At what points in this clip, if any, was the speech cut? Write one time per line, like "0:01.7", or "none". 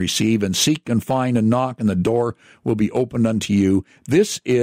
none